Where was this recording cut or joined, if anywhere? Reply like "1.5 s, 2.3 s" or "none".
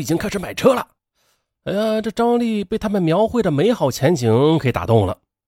1.0 s